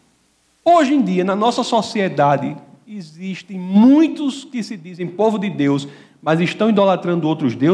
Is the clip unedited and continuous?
yes; 0 cuts

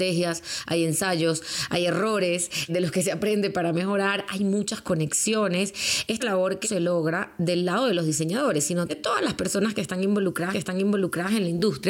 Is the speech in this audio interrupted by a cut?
yes; 5 cuts; at 2.7 s, 6.2 s, 6.6 s, 8.9 s, 10.5 s

